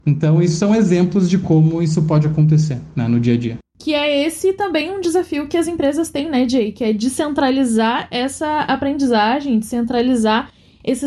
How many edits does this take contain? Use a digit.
0